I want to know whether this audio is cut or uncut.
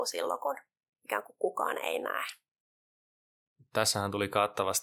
uncut